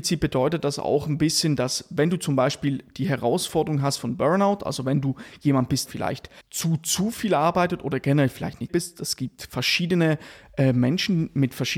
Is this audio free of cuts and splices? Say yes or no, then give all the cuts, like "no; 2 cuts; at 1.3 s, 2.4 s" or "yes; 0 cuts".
no; 3 cuts; at 5.9 s, 6.4 s, 8.7 s